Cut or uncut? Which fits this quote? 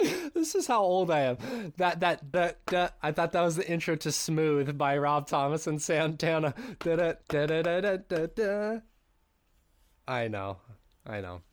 cut